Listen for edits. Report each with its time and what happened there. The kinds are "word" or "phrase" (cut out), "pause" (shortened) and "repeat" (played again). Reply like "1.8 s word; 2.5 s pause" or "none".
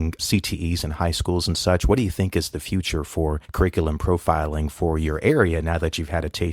none